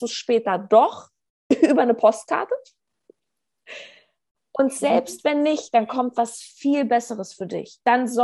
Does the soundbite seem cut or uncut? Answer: uncut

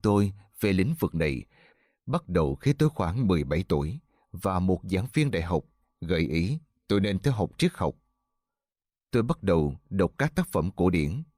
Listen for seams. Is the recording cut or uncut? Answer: uncut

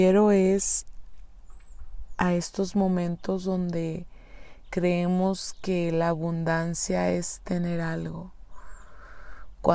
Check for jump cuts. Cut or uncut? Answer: uncut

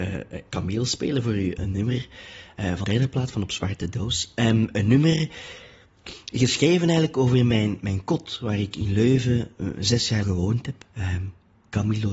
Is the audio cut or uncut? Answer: cut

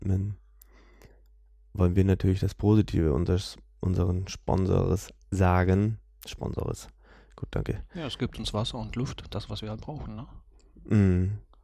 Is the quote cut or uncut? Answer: uncut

